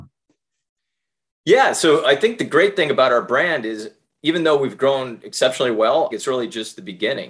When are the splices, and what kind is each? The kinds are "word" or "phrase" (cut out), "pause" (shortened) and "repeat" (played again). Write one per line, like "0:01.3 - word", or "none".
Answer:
0:06.1 - phrase